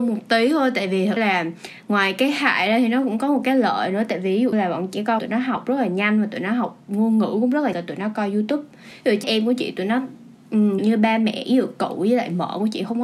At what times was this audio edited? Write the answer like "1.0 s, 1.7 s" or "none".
1.2 s, 4.5 s, 5.2 s, 7.7 s, 9.2 s, 10.8 s